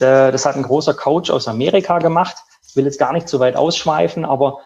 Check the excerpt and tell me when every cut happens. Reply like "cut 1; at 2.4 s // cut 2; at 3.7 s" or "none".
none